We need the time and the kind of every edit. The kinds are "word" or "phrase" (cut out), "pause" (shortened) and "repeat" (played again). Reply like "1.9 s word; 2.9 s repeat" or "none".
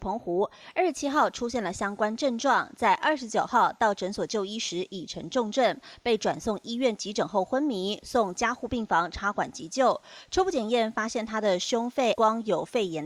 12.1 s word